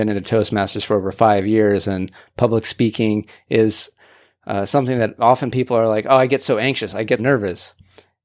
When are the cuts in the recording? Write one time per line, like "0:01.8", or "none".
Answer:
0:07.2